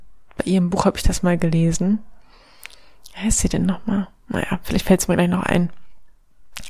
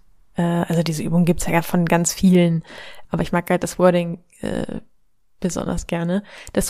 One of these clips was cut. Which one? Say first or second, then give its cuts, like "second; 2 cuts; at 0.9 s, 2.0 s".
second; 1 cut; at 3.0 s